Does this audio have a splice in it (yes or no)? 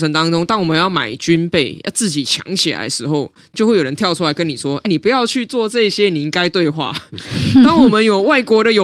yes